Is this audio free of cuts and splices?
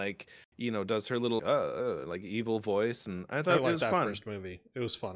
no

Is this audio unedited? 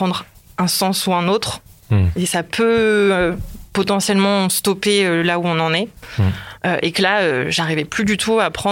yes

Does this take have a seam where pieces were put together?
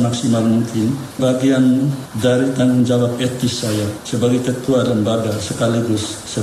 yes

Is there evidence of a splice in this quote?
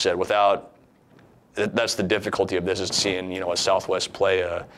yes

